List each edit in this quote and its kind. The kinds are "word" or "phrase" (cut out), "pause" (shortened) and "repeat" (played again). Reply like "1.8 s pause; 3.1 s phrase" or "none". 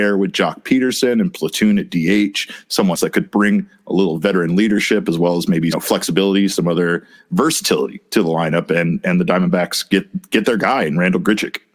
2.9 s word; 5.7 s phrase